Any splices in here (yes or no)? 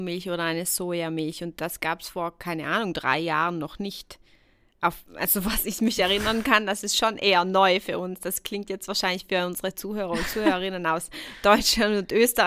no